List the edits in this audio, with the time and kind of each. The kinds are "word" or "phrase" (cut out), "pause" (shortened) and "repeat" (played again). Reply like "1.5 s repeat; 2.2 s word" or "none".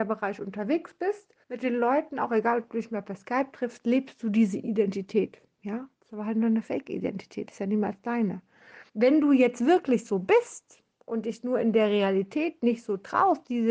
1.4 s pause; 5.9 s pause; 8.9 s pause; 10.9 s pause